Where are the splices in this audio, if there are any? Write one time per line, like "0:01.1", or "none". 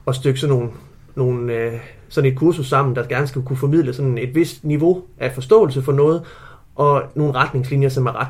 none